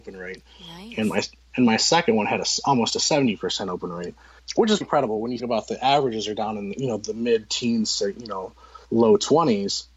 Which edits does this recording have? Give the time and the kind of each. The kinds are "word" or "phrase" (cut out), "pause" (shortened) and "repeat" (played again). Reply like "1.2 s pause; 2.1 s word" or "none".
4.8 s word; 5.4 s word; 8.8 s pause